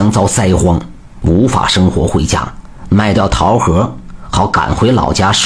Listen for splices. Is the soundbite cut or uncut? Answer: uncut